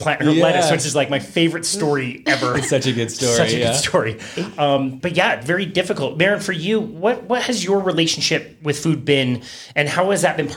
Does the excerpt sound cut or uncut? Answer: cut